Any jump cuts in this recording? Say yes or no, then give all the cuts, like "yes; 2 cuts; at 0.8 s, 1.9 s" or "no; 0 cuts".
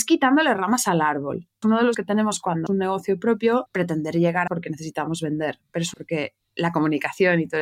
yes; 6 cuts; at 1.6 s, 1.9 s, 2.7 s, 3.7 s, 4.5 s, 5.9 s